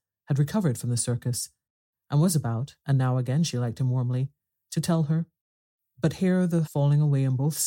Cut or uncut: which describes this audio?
cut